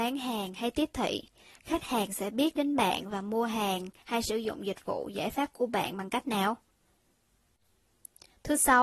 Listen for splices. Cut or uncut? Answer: uncut